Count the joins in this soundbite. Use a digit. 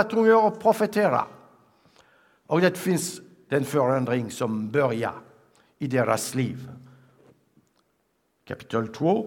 0